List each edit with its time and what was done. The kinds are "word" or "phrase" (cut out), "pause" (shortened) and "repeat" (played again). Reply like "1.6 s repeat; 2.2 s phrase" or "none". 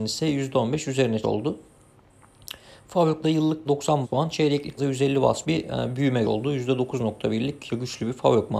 1.2 s word; 3.2 s word; 3.6 s word; 4.0 s word; 4.8 s word; 5.4 s word; 6.2 s word; 7.7 s word